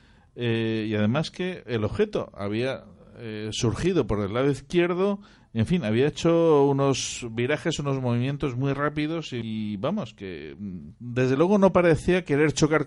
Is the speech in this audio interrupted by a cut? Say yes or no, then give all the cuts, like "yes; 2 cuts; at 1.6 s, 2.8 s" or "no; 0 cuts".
no; 0 cuts